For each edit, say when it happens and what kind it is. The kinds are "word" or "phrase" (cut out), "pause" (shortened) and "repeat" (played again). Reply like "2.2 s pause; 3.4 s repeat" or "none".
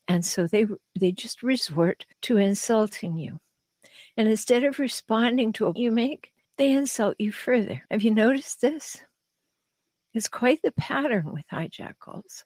2.1 s pause; 5.8 s word; 6.4 s pause; 7.8 s pause